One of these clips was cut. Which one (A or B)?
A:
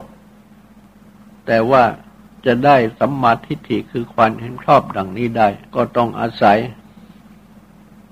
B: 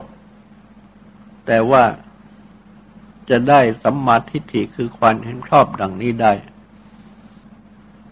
A